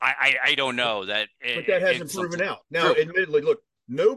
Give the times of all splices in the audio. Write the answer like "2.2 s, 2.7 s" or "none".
2.6 s